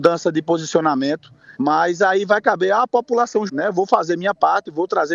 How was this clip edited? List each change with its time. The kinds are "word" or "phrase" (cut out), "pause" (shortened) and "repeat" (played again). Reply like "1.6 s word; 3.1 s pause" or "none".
1.6 s pause; 3.5 s word

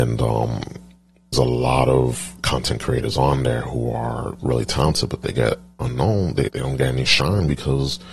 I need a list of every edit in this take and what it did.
1.3 s word; 4.4 s word; 6.5 s word

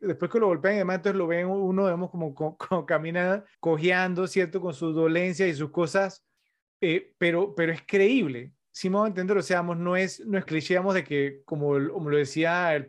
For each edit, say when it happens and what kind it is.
3.5 s pause; 10.5 s phrase

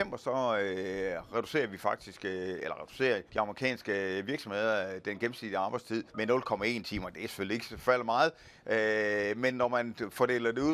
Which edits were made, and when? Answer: 3.3 s pause; 6.1 s pause

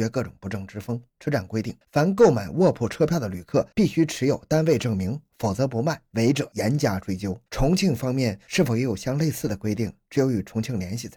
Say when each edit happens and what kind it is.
1.1 s pause; 1.8 s pause; 3.7 s pause; 7.5 s pause

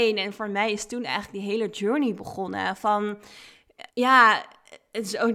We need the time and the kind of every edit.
3.9 s pause

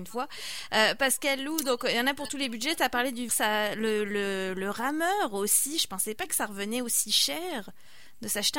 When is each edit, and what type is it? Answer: 3.3 s phrase

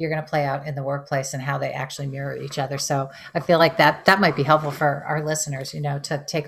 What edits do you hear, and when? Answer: none

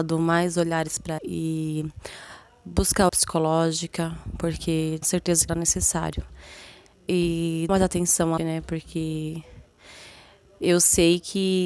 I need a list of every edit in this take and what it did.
1.2 s word; 3.1 s word; 5.0 s word; 5.5 s word; 7.7 s word; 8.4 s word

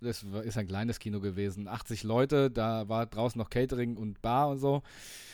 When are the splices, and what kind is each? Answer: none

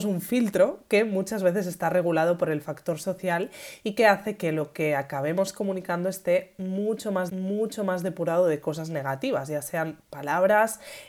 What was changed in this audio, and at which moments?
7.3 s repeat

